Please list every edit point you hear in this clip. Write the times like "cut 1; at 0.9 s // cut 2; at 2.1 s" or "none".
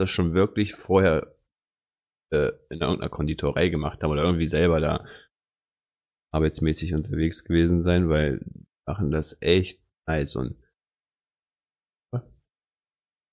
none

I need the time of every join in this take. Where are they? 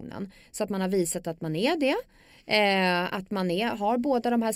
none

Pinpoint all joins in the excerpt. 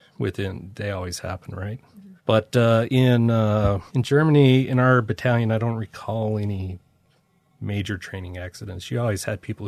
cut 1; at 2.2 s // cut 2; at 3.9 s

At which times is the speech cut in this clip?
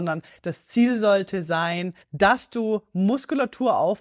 cut 1; at 2.0 s

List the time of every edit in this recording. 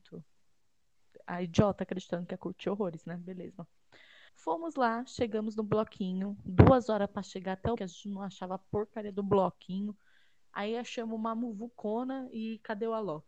cut 1; at 4.3 s // cut 2; at 7.8 s

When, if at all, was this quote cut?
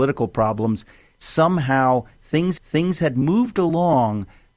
cut 1; at 2.6 s

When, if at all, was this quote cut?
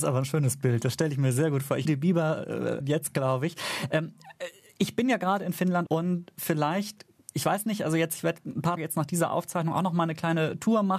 cut 1; at 1.8 s // cut 2; at 2.8 s // cut 3; at 5.9 s // cut 4; at 8.8 s

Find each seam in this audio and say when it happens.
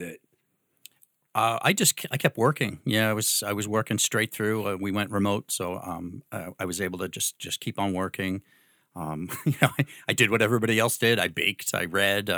none

